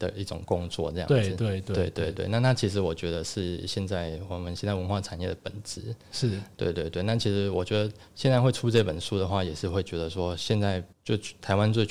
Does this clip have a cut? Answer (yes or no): yes